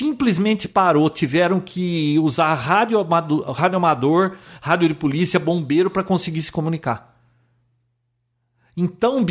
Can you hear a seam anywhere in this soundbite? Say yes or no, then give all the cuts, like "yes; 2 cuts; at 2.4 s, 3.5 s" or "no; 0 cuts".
no; 0 cuts